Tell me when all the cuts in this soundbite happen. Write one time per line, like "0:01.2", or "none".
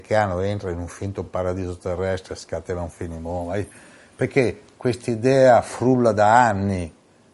none